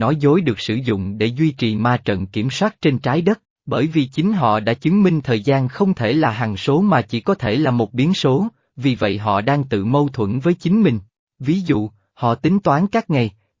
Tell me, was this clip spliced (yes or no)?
no